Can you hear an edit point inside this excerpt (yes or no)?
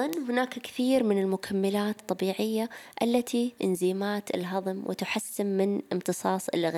yes